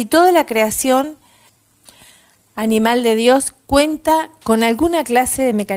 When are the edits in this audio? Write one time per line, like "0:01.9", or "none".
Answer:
none